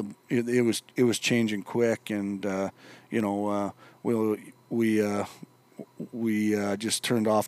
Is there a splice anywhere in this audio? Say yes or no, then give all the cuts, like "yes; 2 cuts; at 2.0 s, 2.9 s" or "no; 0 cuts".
no; 0 cuts